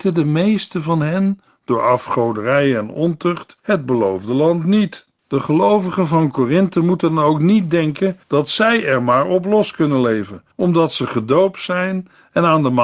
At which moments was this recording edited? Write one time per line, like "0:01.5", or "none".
0:03.6
0:05.2
0:08.2
0:10.5